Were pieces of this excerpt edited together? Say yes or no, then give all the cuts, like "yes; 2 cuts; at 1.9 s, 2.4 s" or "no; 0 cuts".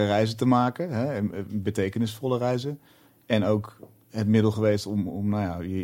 no; 0 cuts